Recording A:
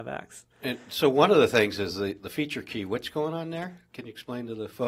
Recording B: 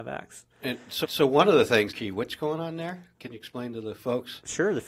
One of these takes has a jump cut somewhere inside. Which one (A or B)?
B